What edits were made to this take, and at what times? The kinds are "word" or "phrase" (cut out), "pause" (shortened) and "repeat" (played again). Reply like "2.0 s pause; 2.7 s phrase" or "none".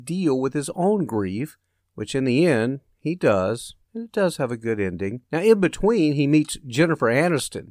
1.8 s pause; 3.8 s pause; 5.3 s pause